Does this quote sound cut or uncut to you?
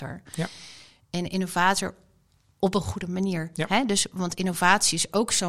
uncut